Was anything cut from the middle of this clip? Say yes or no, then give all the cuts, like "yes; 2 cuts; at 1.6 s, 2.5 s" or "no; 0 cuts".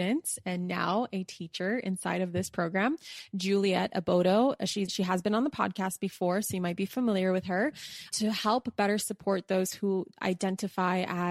yes; 2 cuts; at 4.9 s, 8.1 s